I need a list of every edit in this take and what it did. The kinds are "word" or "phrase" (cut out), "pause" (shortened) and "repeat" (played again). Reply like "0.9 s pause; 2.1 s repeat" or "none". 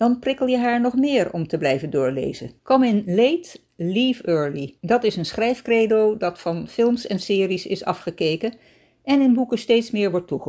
2.6 s pause; 4.8 s pause